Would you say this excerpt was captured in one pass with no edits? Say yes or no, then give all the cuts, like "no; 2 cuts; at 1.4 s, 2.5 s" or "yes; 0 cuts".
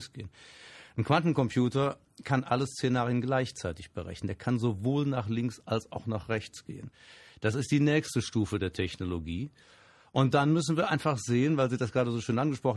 yes; 0 cuts